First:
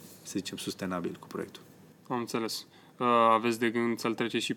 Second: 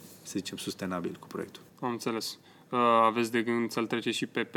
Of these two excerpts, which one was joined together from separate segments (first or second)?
second